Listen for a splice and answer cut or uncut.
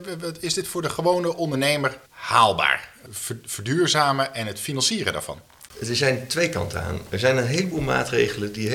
cut